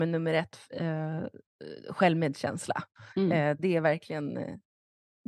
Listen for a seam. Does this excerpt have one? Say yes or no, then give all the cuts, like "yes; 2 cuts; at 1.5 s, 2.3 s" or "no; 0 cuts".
yes; 1 cut; at 3.1 s